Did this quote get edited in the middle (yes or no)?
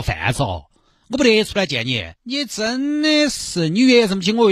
yes